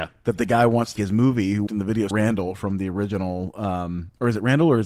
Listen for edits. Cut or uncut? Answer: cut